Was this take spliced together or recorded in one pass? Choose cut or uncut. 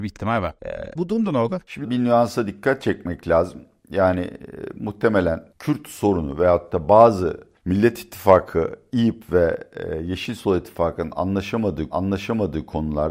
cut